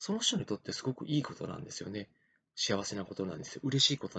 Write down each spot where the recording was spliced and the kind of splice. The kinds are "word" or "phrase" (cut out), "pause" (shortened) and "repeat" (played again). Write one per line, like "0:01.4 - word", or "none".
none